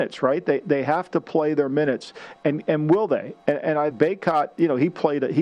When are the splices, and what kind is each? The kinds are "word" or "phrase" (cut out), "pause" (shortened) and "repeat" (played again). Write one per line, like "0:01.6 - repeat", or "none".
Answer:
0:03.9 - word